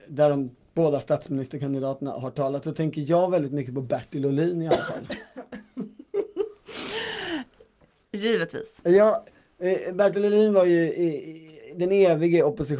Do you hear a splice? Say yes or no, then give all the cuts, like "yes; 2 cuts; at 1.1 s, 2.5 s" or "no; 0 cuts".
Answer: no; 0 cuts